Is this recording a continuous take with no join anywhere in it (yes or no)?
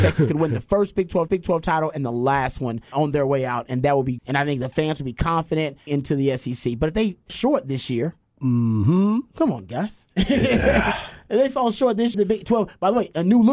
no